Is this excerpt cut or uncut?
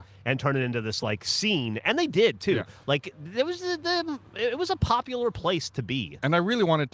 uncut